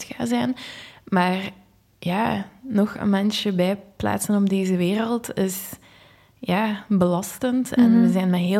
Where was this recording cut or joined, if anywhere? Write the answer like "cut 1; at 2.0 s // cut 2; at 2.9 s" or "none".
none